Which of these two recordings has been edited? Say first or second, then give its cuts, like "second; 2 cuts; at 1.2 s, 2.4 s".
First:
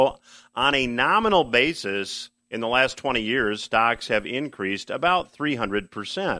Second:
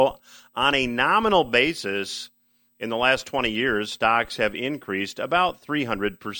first; 1 cut; at 2.4 s